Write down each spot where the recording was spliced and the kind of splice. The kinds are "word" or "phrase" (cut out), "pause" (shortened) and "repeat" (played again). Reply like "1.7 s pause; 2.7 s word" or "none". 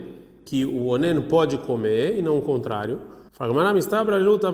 3.3 s pause